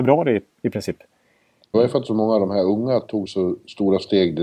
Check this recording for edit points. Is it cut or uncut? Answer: cut